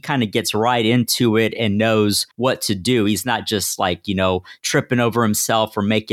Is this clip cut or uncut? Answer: uncut